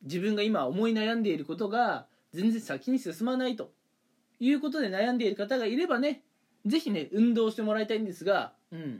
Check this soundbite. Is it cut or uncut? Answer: uncut